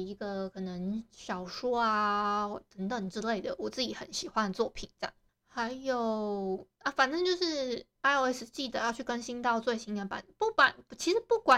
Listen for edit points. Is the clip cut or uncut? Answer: uncut